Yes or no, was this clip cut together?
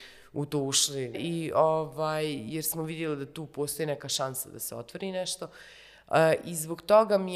yes